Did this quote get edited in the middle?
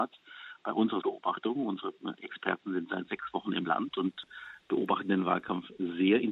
yes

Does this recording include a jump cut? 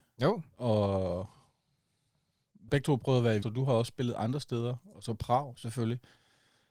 yes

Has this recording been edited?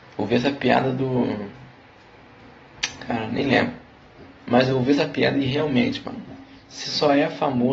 no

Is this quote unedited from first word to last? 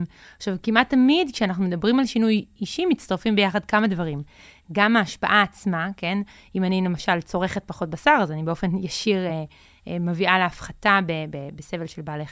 yes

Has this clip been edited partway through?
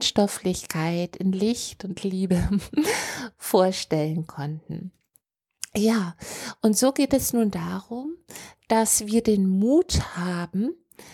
no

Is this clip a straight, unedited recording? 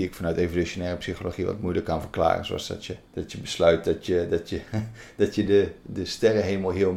no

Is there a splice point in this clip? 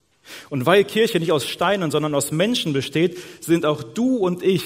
no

